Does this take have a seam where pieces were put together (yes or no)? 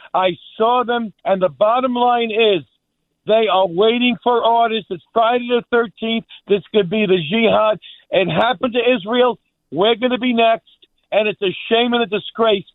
yes